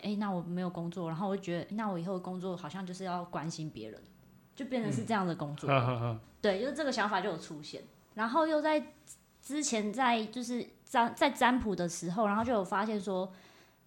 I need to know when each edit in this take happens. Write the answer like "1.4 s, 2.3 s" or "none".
1.7 s, 6.2 s, 8.1 s